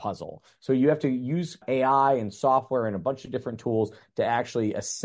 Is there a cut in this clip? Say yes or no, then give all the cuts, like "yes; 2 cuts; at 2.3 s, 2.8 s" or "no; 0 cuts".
no; 0 cuts